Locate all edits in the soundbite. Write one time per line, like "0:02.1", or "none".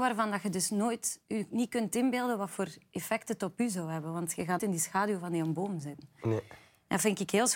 0:04.6